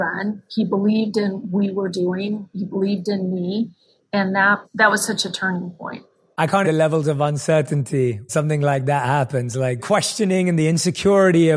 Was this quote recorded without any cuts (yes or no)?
no